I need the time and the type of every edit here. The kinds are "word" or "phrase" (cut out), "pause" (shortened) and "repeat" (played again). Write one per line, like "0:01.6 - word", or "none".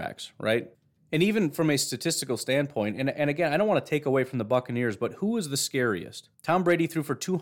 0:06.3 - pause